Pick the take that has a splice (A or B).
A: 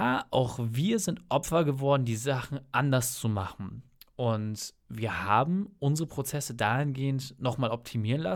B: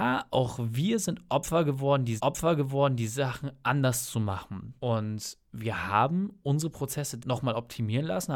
B